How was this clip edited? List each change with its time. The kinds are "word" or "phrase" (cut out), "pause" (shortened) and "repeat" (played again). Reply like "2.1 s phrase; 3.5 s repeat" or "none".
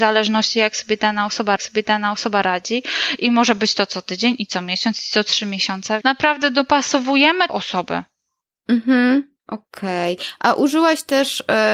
1.6 s repeat; 6.0 s word; 7.5 s phrase; 9.4 s pause